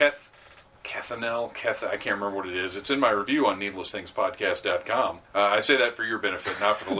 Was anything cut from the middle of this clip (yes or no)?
yes